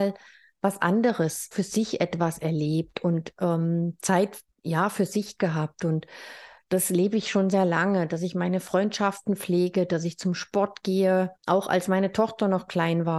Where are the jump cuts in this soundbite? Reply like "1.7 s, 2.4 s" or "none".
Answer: 1.5 s, 4.5 s, 11.4 s